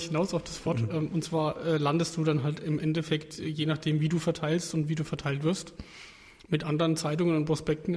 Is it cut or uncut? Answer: uncut